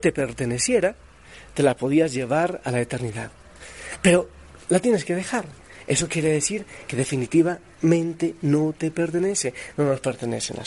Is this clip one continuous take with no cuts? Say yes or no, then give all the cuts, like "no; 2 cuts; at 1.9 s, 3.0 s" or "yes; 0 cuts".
yes; 0 cuts